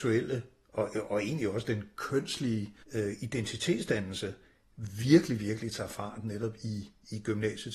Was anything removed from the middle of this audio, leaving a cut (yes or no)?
yes